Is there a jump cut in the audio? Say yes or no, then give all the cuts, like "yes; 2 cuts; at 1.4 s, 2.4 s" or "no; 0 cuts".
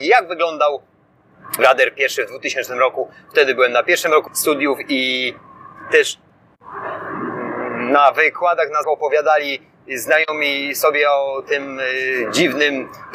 yes; 3 cuts; at 1.6 s, 4.3 s, 8.8 s